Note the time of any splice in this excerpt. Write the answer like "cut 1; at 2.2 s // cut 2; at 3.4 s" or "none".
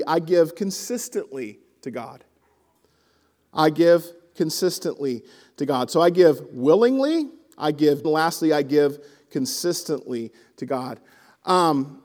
cut 1; at 8.0 s